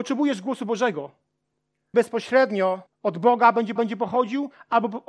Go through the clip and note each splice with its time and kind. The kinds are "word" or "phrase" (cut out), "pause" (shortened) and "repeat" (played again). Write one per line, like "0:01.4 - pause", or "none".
0:01.9 - word
0:02.9 - pause
0:03.8 - repeat